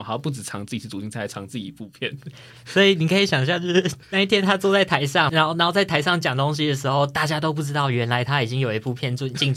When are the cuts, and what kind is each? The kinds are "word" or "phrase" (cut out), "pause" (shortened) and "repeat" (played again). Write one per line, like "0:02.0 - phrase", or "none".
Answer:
0:04.0 - pause
0:05.3 - phrase